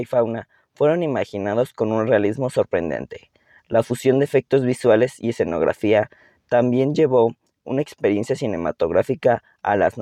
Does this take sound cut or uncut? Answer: uncut